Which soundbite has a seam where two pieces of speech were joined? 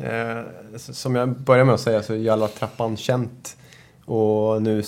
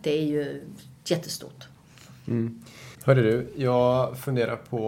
second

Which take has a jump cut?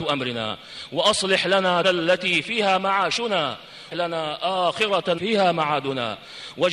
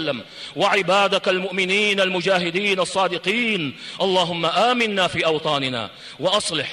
first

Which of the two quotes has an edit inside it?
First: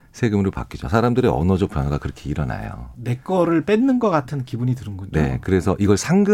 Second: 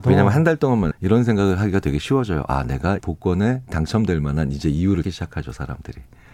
second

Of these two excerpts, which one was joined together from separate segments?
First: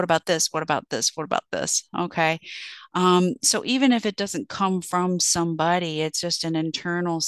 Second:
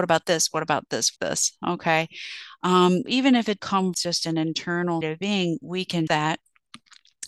second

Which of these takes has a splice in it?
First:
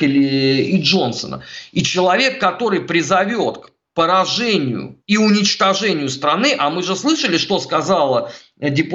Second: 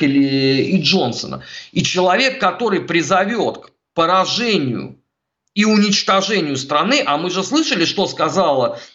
first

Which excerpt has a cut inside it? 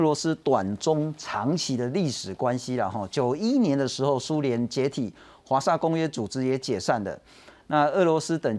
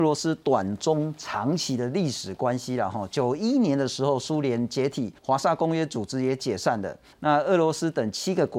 second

